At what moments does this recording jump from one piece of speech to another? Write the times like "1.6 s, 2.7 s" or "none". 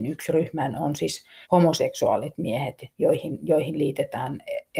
1.4 s